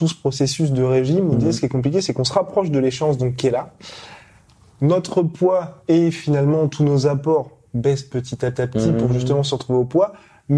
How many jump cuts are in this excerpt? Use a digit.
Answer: 1